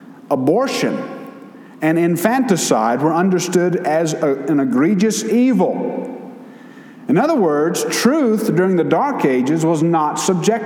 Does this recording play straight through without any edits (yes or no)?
yes